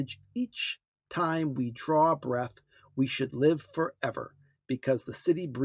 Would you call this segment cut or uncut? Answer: uncut